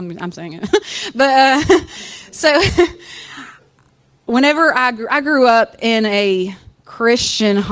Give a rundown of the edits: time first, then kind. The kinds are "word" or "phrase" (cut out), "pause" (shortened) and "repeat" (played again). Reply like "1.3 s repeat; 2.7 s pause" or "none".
6.8 s pause